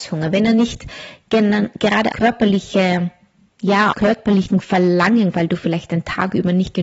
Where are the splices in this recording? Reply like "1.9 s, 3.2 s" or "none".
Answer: 2.1 s, 3.9 s, 5.3 s